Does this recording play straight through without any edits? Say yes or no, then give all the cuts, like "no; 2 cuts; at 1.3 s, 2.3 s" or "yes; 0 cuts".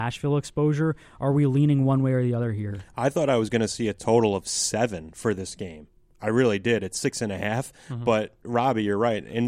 yes; 0 cuts